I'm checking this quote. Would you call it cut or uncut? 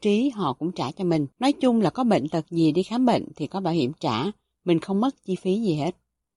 cut